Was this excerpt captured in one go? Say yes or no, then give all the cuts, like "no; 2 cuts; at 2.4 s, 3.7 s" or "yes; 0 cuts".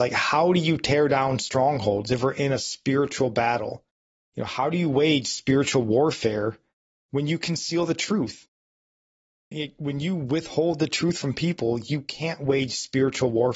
yes; 0 cuts